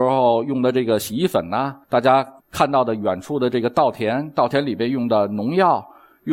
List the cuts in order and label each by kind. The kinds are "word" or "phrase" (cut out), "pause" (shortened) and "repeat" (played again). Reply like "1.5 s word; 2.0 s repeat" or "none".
1.8 s pause; 2.4 s pause